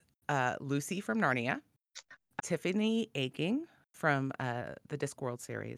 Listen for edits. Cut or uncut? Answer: cut